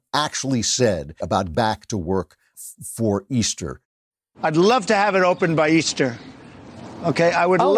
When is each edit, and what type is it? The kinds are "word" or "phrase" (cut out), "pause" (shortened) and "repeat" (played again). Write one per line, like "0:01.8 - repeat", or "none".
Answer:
0:01.2 - word
0:01.5 - word
0:02.5 - word